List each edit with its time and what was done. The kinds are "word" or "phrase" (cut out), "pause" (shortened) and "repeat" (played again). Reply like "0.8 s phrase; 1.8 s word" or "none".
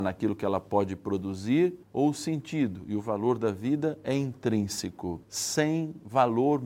1.8 s pause; 5.2 s pause